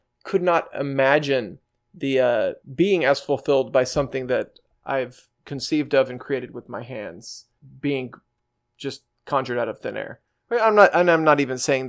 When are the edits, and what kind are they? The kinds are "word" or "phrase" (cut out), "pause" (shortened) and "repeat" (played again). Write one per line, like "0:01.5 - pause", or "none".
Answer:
0:02.6 - pause
0:05.3 - pause
0:09.1 - pause